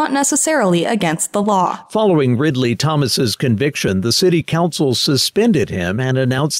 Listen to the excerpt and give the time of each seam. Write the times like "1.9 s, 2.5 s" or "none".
none